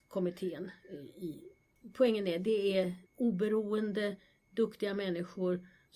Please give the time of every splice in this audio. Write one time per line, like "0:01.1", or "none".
0:03.1